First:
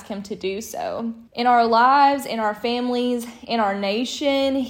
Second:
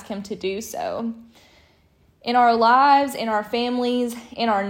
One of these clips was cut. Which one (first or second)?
first